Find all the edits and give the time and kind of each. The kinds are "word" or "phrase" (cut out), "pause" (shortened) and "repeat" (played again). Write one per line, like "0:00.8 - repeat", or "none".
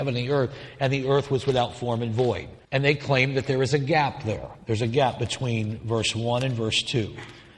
0:02.6 - pause